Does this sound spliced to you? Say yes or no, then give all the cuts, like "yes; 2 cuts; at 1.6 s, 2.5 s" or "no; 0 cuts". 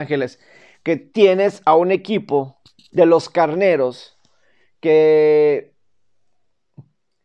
no; 0 cuts